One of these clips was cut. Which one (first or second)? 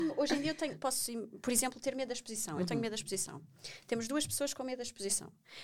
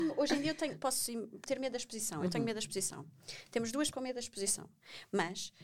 second